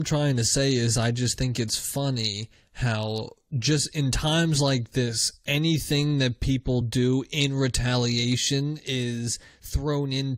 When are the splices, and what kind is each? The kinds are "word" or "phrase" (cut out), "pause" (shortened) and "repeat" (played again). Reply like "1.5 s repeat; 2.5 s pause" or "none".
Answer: none

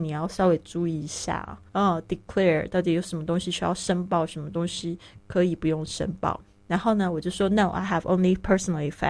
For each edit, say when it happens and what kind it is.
1.7 s pause

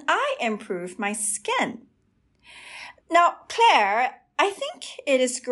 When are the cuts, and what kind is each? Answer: 3.0 s pause

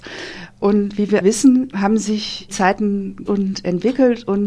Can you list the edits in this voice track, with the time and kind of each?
1.2 s word; 1.7 s word; 2.5 s word; 3.3 s word

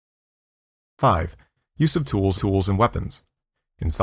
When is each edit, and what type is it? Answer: 2.3 s repeat

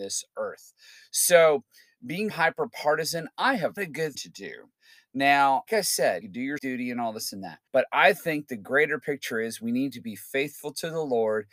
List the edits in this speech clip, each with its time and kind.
2.3 s word; 3.8 s phrase; 4.1 s phrase; 5.7 s word; 6.2 s word; 6.6 s word; 7.7 s pause

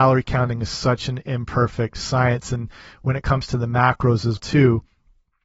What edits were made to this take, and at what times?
4.4 s word

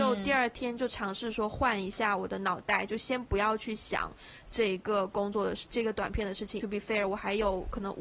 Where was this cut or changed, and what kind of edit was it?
6.6 s phrase

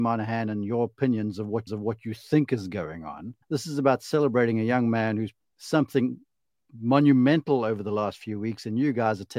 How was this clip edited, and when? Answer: 1.7 s repeat; 3.4 s pause; 5.4 s phrase

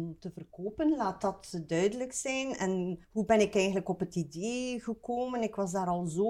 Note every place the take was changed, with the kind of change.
3.0 s pause

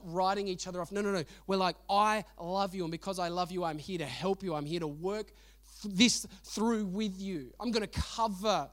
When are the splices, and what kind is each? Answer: none

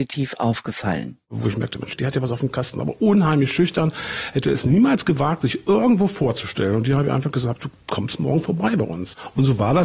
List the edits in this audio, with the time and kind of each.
none

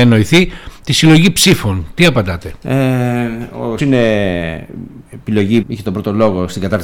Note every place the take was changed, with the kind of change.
3.8 s word; 5.6 s word

